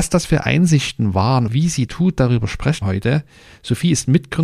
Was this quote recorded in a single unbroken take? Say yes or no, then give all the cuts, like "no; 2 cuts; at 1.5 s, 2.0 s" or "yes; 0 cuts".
no; 3 cuts; at 1.5 s, 1.9 s, 2.8 s